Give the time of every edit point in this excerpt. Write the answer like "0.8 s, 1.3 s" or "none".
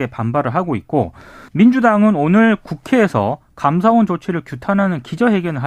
1.5 s